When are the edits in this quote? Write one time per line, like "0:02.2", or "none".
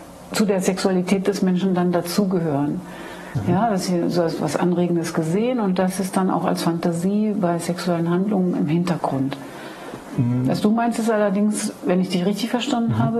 none